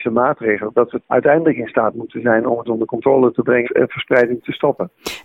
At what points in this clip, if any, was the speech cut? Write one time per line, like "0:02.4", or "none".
0:01.0
0:02.7
0:03.6

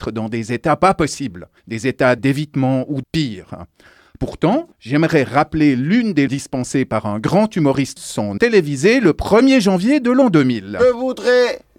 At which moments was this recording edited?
0:01.6
0:02.2
0:03.0
0:04.7
0:06.3
0:08.0
0:08.4

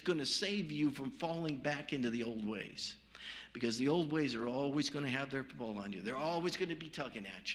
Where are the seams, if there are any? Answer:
none

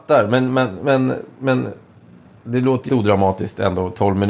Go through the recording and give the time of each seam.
0:02.9

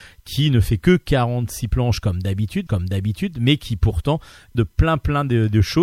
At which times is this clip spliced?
0:02.7
0:04.5

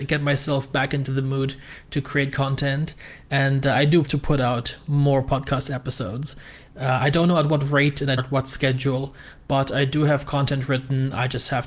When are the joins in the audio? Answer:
0:04.1
0:08.2

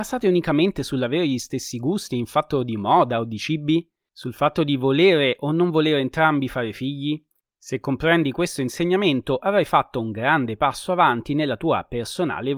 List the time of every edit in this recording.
none

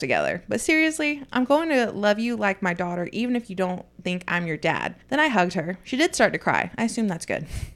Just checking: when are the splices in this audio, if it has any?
0:05.0

